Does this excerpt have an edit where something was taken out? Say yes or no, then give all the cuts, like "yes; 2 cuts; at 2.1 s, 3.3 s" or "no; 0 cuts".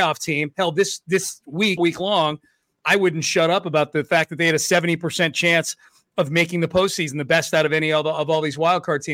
yes; 1 cut; at 1.8 s